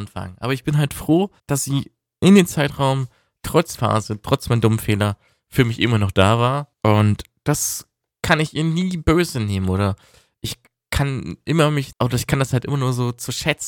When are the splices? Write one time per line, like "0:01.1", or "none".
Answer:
0:01.4
0:03.7
0:06.7
0:11.9